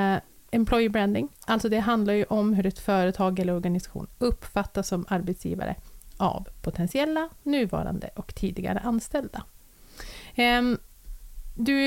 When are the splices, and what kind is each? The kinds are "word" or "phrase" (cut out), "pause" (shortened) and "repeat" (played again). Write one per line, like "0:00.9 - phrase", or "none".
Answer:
0:01.3 - pause